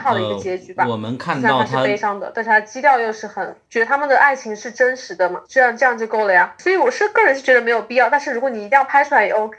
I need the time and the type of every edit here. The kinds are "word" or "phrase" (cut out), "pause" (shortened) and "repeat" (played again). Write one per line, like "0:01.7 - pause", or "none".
0:05.5 - pause